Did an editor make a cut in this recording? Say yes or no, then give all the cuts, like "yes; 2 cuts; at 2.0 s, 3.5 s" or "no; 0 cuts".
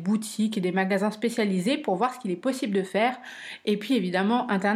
no; 0 cuts